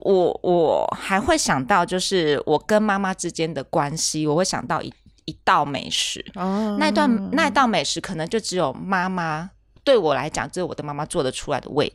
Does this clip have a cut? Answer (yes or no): no